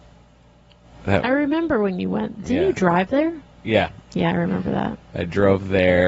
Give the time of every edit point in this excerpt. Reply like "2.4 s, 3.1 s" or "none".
none